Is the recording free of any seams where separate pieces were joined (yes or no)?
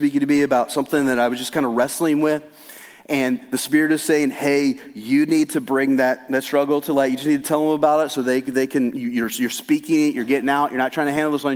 yes